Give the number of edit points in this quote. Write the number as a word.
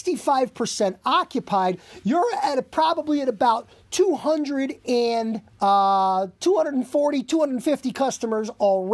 one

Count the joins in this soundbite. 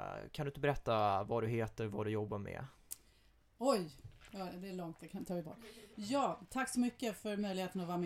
zero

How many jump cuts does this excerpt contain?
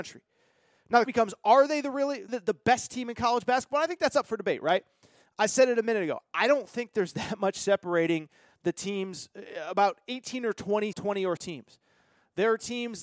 four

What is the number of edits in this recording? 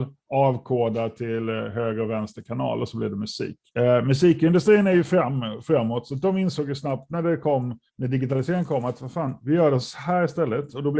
two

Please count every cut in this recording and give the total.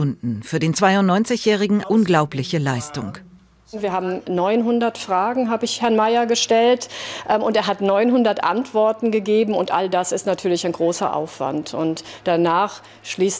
one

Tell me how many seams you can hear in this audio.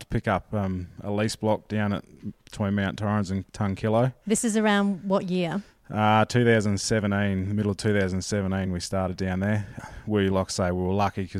zero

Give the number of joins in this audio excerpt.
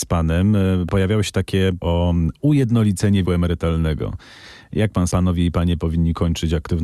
three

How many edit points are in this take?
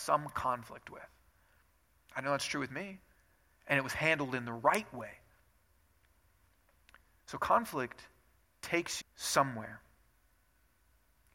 one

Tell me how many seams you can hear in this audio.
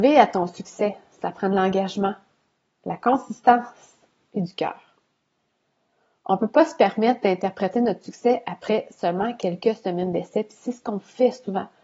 zero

